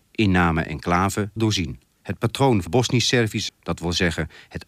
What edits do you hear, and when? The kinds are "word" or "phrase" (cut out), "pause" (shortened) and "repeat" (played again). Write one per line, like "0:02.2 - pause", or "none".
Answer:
0:01.4 - word
0:01.9 - pause
0:02.7 - word
0:03.5 - word